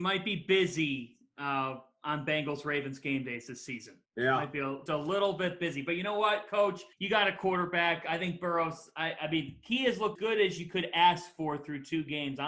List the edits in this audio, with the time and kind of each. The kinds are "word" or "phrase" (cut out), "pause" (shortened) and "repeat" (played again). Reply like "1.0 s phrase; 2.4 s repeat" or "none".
4.1 s pause; 4.9 s word; 6.9 s pause; 10.2 s word